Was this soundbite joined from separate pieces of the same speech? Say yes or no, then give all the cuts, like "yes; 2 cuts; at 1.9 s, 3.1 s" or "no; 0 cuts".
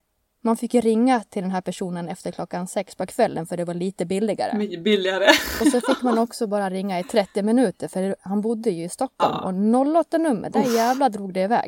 no; 0 cuts